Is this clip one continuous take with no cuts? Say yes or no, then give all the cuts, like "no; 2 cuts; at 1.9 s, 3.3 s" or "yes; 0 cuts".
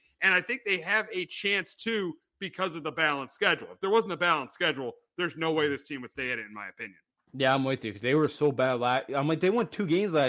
no; 1 cut; at 7.1 s